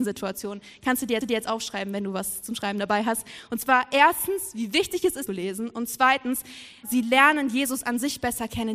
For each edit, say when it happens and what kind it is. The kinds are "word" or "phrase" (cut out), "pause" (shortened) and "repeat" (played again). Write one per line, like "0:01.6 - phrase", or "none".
0:01.2 - repeat
0:05.3 - phrase
0:06.8 - word